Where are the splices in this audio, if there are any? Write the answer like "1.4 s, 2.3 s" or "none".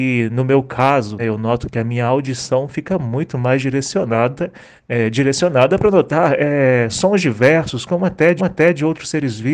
1.2 s, 4.8 s, 8.4 s

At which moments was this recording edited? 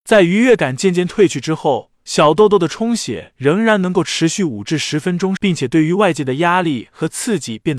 5.4 s

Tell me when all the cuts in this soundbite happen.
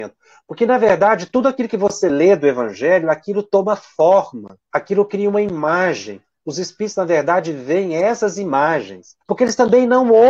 4.6 s, 9.2 s

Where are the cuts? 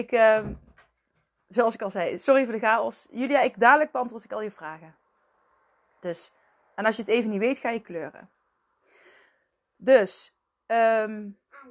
none

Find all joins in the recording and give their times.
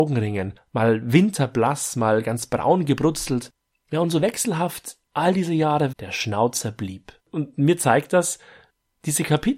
5.9 s, 7.2 s

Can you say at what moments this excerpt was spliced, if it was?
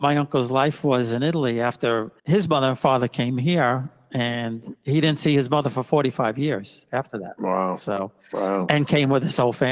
2.2 s

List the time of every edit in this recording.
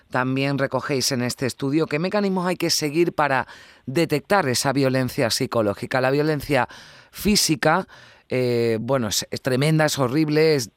none

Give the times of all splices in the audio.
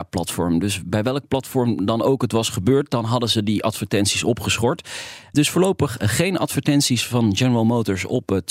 none

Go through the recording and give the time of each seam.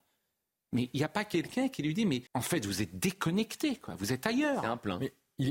2.3 s

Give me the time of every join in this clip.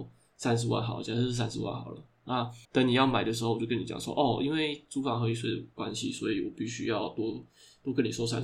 2.6 s

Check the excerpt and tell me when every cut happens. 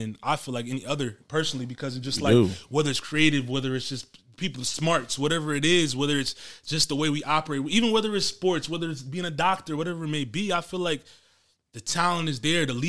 none

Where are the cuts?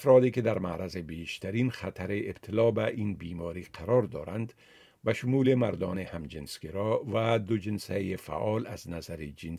none

